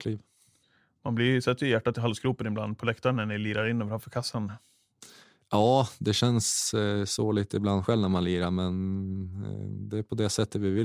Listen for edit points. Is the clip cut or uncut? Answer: uncut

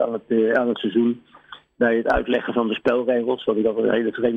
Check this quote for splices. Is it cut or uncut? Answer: uncut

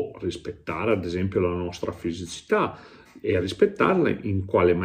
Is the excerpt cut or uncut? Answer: uncut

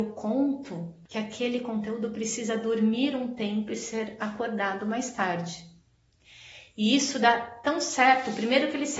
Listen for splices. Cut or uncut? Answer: uncut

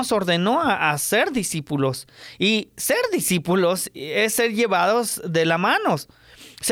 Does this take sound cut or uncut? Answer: uncut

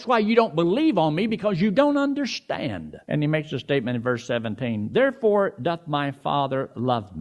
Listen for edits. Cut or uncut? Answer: cut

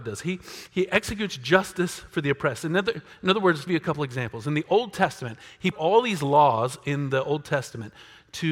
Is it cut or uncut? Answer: cut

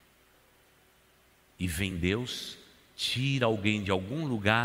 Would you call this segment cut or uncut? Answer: uncut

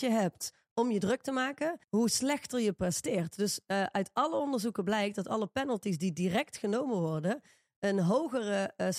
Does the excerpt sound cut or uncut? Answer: cut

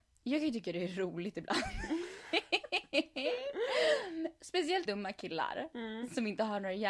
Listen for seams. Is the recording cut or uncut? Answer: cut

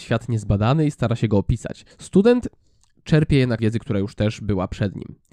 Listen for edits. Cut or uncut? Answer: cut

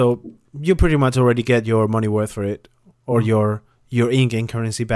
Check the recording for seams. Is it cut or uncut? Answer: uncut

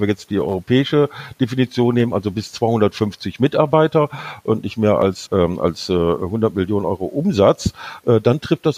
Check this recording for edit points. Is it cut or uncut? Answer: cut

